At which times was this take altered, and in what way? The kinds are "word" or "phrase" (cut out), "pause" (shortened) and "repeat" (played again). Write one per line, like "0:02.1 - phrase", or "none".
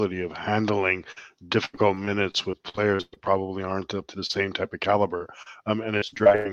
0:04.1 - word